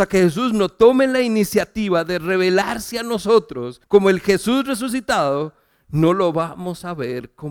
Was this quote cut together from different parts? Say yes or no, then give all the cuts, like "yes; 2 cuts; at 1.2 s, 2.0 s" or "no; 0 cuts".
yes; 1 cut; at 3.8 s